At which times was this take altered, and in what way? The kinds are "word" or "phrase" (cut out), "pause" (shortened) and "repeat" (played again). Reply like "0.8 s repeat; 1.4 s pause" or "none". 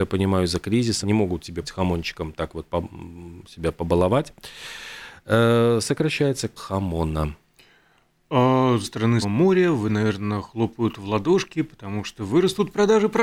1.0 s word; 1.6 s word; 6.6 s word; 8.8 s word; 9.2 s word; 9.9 s word